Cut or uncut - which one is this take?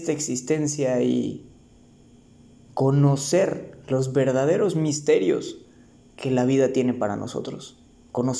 uncut